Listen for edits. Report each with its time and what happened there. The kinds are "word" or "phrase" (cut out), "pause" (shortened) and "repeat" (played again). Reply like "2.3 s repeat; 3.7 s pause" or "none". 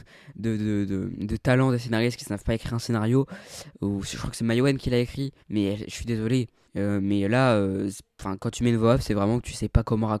5.4 s pause; 6.6 s pause